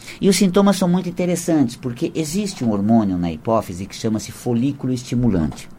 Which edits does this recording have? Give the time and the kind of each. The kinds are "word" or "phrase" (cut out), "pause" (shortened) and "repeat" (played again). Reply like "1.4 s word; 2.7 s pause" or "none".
none